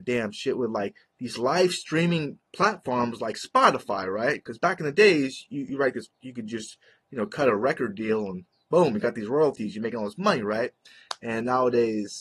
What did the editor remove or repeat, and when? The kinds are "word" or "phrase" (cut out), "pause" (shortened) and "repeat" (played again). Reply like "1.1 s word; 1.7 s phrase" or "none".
none